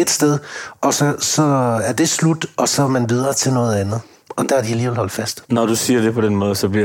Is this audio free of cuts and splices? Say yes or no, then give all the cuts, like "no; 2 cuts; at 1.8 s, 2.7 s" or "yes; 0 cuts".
yes; 0 cuts